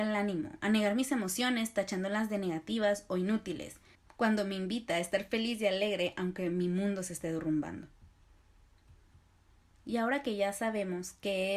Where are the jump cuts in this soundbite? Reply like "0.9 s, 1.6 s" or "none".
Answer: 3.9 s